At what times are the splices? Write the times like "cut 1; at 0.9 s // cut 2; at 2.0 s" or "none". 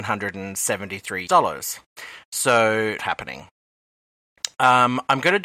cut 1; at 1.3 s // cut 2; at 3.0 s

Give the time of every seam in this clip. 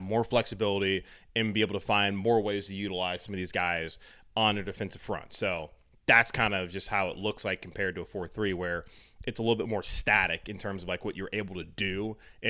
none

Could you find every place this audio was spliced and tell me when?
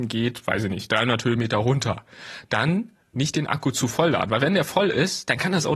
none

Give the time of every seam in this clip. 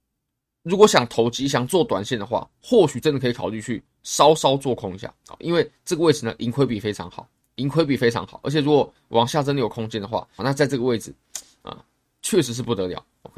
cut 1; at 10.4 s

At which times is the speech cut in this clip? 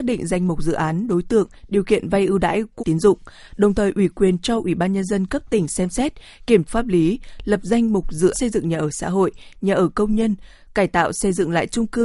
cut 1; at 2.8 s // cut 2; at 6.7 s // cut 3; at 8.3 s

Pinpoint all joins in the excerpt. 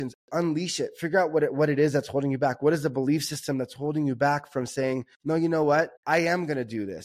cut 1; at 5.1 s // cut 2; at 6.0 s

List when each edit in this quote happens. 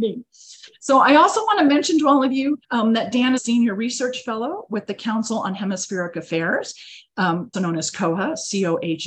cut 1; at 2.6 s // cut 2; at 3.4 s // cut 3; at 7.5 s

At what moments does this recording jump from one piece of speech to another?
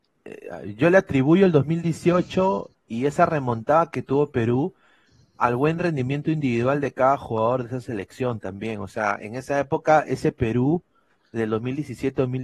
none

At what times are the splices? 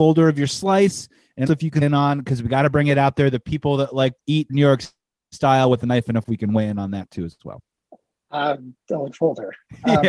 cut 1; at 1.5 s // cut 2; at 1.8 s // cut 3; at 4.2 s // cut 4; at 4.5 s // cut 5; at 6.2 s // cut 6; at 9.1 s

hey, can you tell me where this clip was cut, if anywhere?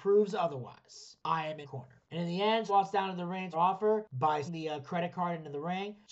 cut 1; at 1.6 s // cut 2; at 2.7 s // cut 3; at 3.5 s // cut 4; at 4.5 s

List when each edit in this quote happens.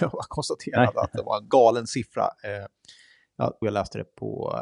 cut 1; at 1.5 s // cut 2; at 3.6 s

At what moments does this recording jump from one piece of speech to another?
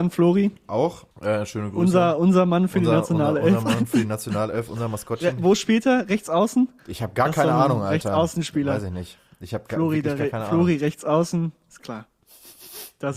cut 1; at 1.1 s // cut 2; at 6.8 s

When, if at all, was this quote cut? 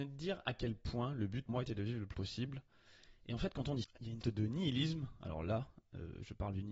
cut 1; at 1.5 s // cut 2; at 2.1 s // cut 3; at 3.8 s // cut 4; at 4.2 s

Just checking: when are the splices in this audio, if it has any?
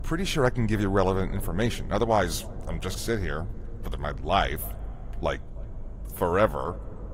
cut 1; at 3.0 s // cut 2; at 3.9 s

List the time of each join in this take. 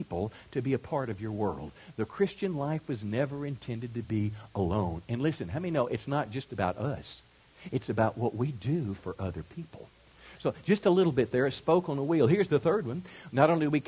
none

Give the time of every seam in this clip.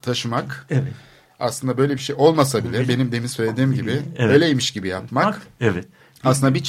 none

